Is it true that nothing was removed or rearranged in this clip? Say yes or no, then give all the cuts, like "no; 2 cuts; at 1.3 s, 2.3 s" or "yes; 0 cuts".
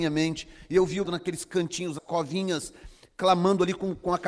no; 2 cuts; at 1.0 s, 2.0 s